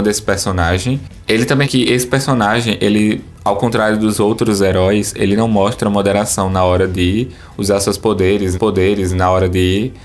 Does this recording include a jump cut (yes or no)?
yes